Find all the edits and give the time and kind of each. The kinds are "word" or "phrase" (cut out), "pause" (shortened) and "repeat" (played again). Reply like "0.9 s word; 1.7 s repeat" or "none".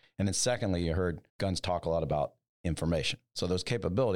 1.3 s pause